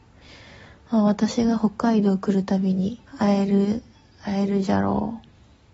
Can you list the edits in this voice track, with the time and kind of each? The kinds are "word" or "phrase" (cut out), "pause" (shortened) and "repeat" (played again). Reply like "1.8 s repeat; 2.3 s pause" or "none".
3.1 s pause